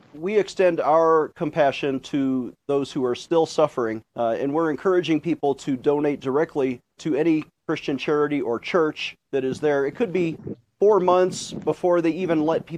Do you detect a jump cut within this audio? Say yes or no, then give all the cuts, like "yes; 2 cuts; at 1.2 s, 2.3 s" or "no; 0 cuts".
yes; 3 cuts; at 4.1 s, 7.0 s, 9.2 s